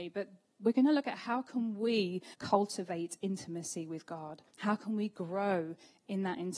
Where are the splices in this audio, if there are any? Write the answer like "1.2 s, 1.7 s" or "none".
2.3 s, 4.5 s